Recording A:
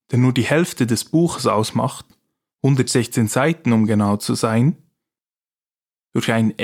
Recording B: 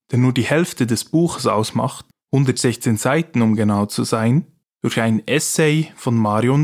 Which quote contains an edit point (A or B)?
B